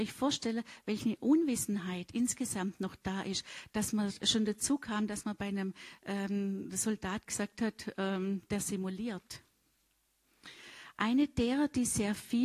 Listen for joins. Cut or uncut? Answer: uncut